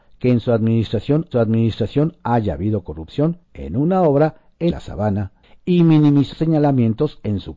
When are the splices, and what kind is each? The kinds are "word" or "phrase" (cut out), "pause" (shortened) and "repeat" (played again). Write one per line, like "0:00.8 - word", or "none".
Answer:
0:01.3 - repeat
0:03.4 - pause
0:04.7 - phrase
0:05.4 - pause
0:06.3 - word